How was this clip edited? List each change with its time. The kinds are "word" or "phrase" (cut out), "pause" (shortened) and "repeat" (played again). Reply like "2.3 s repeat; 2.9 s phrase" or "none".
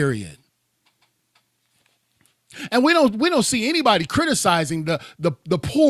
none